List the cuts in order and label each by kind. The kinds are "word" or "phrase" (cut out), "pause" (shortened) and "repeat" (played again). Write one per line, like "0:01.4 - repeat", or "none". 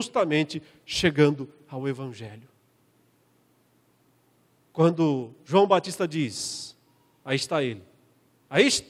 none

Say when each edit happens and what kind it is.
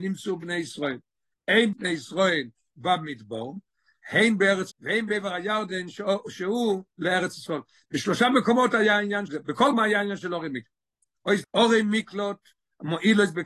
0:01.7 - word
0:04.7 - word
0:06.9 - word
0:09.3 - word
0:09.7 - word
0:11.4 - word

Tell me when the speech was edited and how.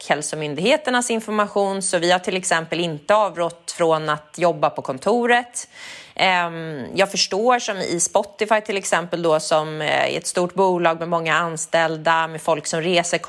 none

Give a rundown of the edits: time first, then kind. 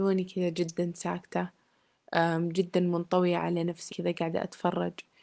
0:03.9 - word

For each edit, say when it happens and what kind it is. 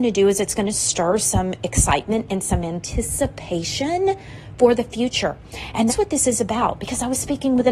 0:05.9 - word

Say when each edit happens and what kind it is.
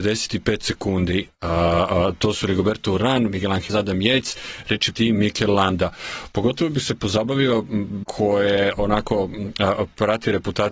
0:03.7 - word
0:04.9 - word
0:08.0 - word

